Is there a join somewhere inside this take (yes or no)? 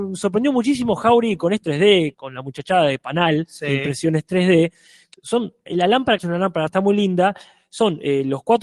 yes